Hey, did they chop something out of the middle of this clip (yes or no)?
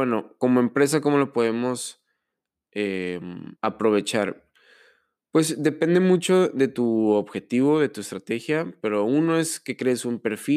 yes